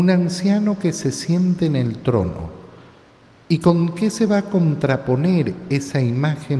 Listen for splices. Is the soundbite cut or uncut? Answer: uncut